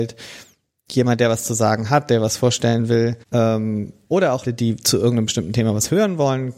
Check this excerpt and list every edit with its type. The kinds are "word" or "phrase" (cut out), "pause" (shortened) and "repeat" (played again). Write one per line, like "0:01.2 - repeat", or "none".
0:03.2 - pause
0:04.4 - word